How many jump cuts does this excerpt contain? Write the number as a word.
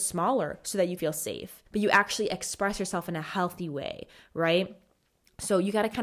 two